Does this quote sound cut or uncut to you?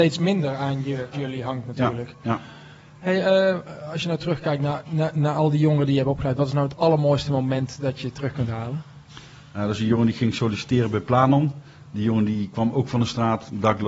cut